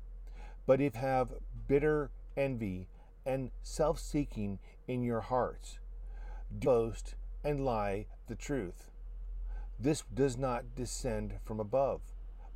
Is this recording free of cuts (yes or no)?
no